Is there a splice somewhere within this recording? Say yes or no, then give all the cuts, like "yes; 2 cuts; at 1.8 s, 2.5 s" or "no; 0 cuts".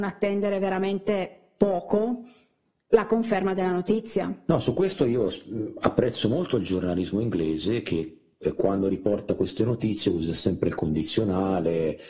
no; 0 cuts